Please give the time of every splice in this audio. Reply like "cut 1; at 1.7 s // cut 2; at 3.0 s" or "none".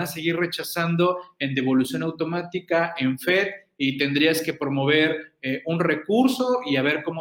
none